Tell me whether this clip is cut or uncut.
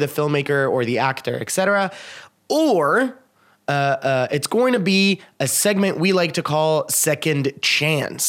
uncut